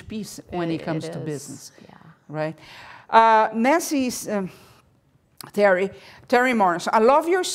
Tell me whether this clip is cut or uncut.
uncut